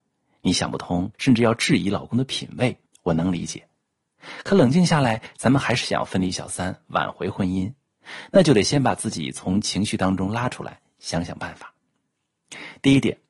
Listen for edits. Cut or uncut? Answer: cut